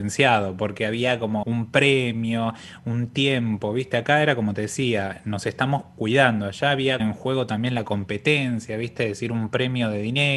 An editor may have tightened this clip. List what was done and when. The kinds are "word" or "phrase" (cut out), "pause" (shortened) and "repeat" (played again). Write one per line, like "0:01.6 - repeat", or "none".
0:01.4 - word
0:07.0 - phrase